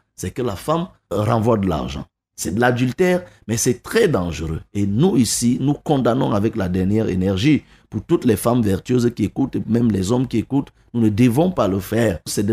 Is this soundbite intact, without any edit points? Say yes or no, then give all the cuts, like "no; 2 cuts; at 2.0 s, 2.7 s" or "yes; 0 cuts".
yes; 0 cuts